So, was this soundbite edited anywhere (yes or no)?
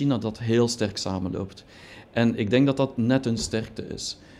no